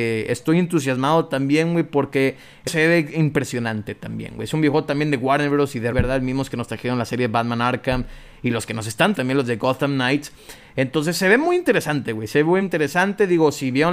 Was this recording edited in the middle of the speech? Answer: yes; 4 cuts; at 2.7 s, 5.9 s, 9.1 s, 12.6 s

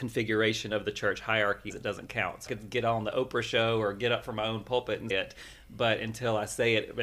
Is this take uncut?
no; 3 cuts; at 1.7 s, 2.5 s, 5.1 s

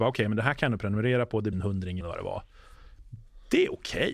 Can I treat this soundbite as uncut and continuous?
no; 2 cuts; at 1.5 s, 2.0 s

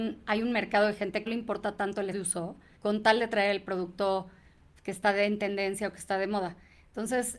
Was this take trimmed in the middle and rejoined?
yes; 3 cuts; at 1.3 s, 2.1 s, 2.8 s

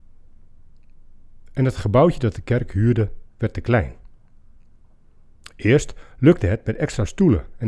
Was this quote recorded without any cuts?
no; 1 cut; at 3.3 s

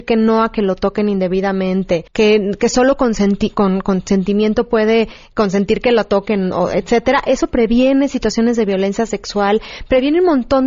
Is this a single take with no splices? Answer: no; 1 cut; at 2.1 s

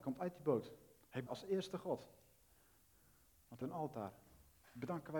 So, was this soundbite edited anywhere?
yes; 2 cuts; at 1.3 s, 3.6 s

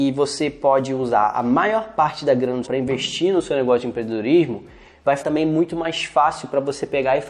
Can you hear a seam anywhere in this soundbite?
yes; 2 cuts; at 2.6 s, 5.2 s

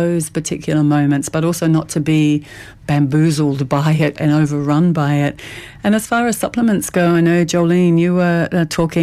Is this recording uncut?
yes; 0 cuts

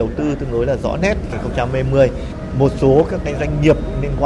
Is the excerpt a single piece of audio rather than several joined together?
yes; 0 cuts

